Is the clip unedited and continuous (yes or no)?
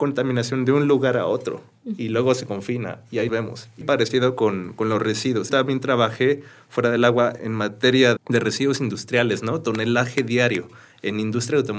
no